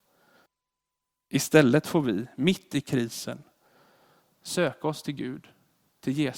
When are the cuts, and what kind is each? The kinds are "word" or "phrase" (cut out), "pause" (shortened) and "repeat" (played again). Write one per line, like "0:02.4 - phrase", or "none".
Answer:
none